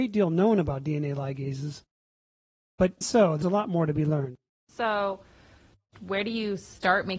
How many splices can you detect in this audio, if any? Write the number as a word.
three